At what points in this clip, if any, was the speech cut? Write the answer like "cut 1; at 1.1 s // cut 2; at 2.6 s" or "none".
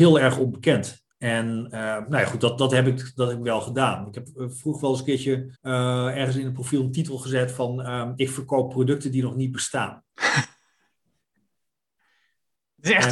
cut 1; at 1.1 s // cut 2; at 5.5 s